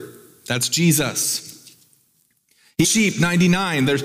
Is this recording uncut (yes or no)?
no